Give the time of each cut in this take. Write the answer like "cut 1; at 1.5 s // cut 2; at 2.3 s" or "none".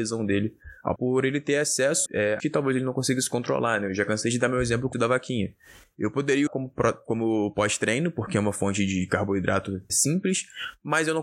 cut 1; at 1.0 s // cut 2; at 2.1 s // cut 3; at 2.4 s // cut 4; at 4.9 s // cut 5; at 6.5 s // cut 6; at 9.9 s